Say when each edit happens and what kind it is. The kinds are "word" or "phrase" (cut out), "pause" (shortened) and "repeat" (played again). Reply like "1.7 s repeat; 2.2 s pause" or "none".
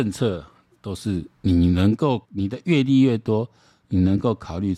1.3 s pause; 2.2 s pause